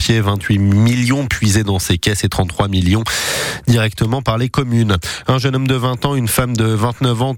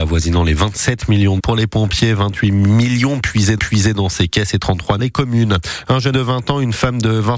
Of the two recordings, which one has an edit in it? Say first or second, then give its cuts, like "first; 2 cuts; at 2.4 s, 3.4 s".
second; 4 cuts; at 1.4 s, 3.6 s, 5.0 s, 6.1 s